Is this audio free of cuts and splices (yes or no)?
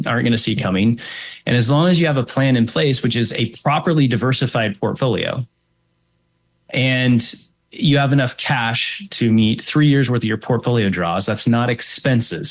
yes